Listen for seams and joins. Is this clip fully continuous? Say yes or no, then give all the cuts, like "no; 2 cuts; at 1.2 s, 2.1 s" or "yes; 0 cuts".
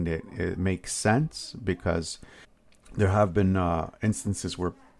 no; 1 cut; at 2.4 s